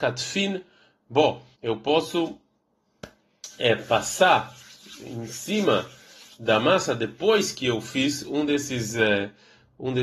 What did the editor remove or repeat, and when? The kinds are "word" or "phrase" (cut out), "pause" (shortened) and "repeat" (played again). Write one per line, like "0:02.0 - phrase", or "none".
0:01.5 - pause

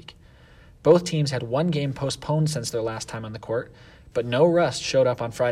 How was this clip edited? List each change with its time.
none

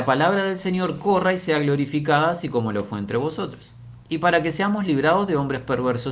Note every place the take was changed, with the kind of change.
0:04.0 - pause

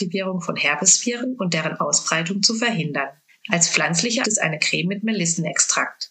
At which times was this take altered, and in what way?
0:03.3 - pause
0:04.2 - phrase

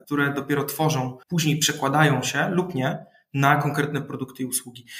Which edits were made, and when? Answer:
0:01.2 - pause

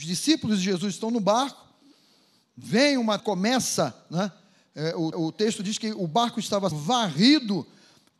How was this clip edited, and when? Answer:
0:03.2 - word
0:05.1 - repeat
0:06.7 - word

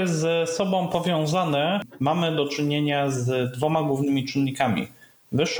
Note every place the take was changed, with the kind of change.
none

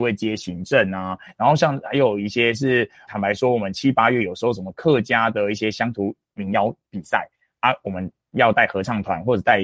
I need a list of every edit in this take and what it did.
0:03.1 - word

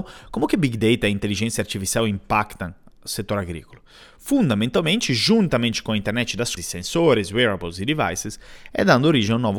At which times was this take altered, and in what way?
0:06.6 - word

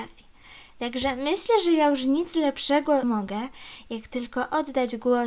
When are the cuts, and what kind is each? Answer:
0:03.0 - phrase

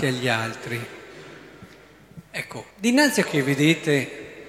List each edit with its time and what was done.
0:02.7 - pause
0:03.2 - phrase

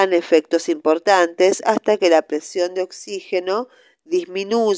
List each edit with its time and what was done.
none

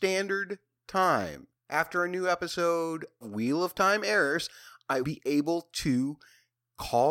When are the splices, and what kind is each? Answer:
0:01.6 - pause
0:03.2 - word
0:05.0 - phrase

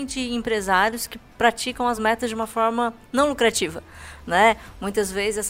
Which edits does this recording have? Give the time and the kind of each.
none

